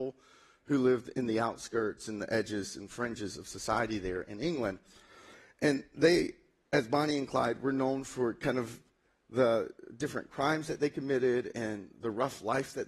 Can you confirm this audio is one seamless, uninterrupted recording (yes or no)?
yes